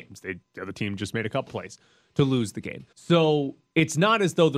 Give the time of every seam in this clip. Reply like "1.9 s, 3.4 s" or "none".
1.5 s, 2.9 s

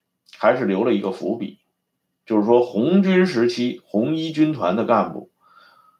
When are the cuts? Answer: none

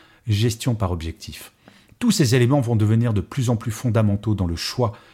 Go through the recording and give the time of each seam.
none

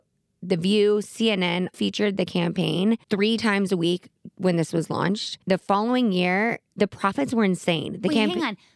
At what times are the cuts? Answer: 1.7 s, 3.0 s, 5.4 s, 6.7 s

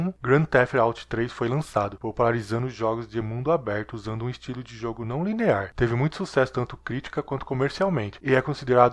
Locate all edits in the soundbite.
none

